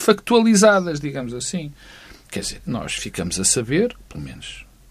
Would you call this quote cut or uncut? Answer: cut